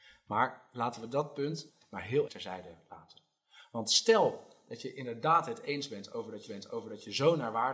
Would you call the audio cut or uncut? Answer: cut